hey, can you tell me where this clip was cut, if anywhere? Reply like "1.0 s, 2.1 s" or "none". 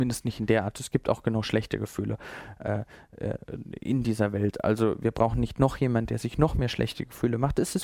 none